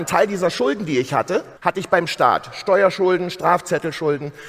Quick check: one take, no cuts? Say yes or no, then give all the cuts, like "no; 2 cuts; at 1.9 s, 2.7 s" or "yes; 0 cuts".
no; 1 cut; at 1.6 s